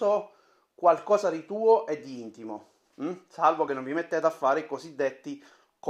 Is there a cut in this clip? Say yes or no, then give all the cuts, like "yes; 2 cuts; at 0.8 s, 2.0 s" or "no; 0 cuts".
no; 0 cuts